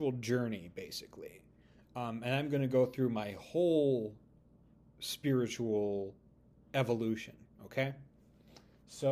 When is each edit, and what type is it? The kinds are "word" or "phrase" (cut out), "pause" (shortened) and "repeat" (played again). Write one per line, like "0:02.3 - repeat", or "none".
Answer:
none